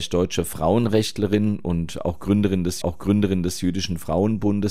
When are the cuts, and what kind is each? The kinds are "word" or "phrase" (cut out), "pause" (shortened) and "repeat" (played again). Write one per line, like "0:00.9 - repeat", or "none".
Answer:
0:02.8 - repeat